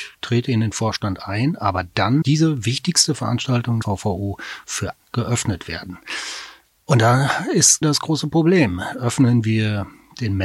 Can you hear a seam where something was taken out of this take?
yes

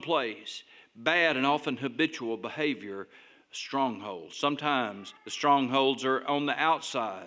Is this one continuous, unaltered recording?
no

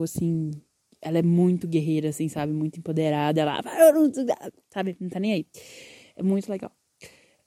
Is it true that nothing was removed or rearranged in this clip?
yes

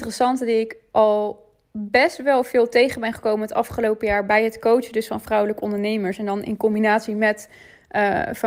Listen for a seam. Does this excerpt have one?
no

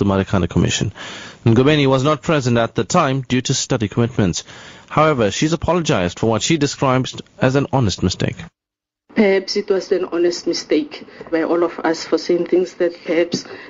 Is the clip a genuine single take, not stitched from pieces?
no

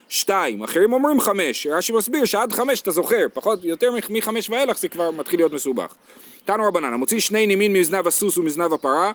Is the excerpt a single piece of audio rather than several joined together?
yes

